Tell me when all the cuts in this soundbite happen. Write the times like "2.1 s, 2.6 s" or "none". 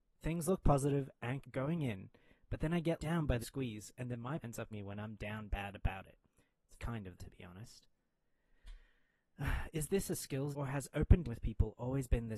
1.4 s, 3.0 s, 3.4 s, 4.4 s, 4.7 s, 6.8 s, 7.2 s, 10.5 s, 11.2 s